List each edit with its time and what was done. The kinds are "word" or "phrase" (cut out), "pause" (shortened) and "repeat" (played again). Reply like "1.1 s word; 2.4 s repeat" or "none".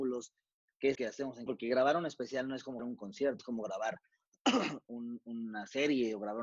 0.9 s word; 1.5 s word; 2.8 s word; 3.4 s word